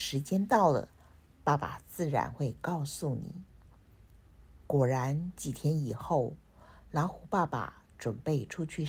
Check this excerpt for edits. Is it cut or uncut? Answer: uncut